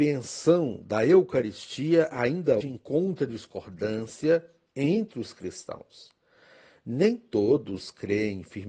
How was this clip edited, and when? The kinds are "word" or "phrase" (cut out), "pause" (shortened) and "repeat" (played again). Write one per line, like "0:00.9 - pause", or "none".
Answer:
0:02.6 - word